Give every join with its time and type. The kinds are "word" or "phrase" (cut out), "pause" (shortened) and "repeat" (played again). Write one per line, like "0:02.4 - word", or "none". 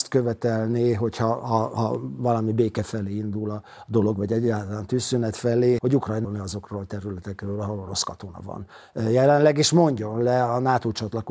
0:05.8 - word
0:06.2 - word